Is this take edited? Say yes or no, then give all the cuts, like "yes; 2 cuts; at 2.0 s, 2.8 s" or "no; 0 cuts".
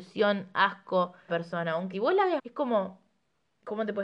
yes; 3 cuts; at 1.3 s, 1.9 s, 2.4 s